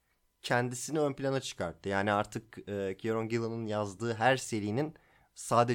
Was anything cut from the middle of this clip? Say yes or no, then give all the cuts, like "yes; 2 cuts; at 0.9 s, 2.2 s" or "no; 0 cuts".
no; 0 cuts